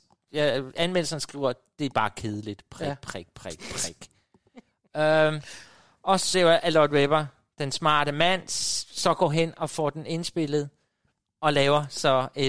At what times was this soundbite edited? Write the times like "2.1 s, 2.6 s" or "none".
6.3 s